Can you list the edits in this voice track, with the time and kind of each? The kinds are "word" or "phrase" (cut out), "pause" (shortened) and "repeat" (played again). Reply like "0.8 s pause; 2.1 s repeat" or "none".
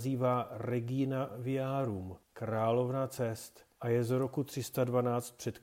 2.2 s pause; 3.8 s pause